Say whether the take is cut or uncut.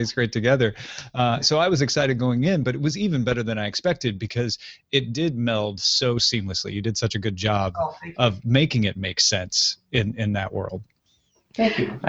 uncut